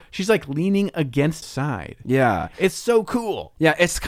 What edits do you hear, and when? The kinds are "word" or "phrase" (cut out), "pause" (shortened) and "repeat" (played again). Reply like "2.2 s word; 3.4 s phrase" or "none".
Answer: 1.4 s phrase